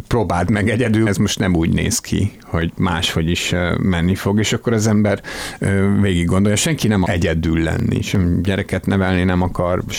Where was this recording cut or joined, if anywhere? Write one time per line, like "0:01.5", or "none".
0:01.1
0:07.0